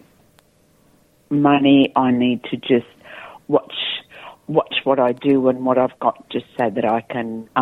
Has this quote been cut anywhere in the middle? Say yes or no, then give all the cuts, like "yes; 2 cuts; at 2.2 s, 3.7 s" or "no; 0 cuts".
no; 0 cuts